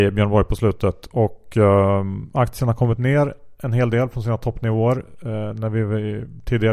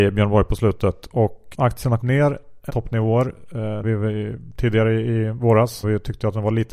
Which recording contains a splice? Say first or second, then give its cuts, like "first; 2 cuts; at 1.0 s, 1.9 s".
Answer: second; 5 cuts; at 1.5 s, 2.0 s, 2.7 s, 3.8 s, 5.8 s